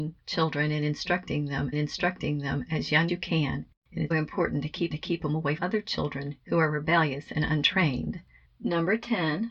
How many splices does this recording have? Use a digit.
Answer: 6